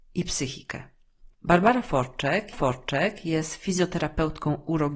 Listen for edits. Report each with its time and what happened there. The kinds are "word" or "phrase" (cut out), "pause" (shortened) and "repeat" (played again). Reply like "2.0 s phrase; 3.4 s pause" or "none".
1.3 s pause; 2.5 s repeat